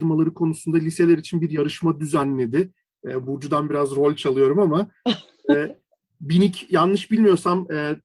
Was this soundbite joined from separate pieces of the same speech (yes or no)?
no